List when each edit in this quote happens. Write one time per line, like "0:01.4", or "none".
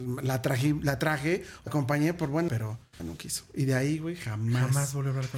0:01.7
0:02.5
0:03.0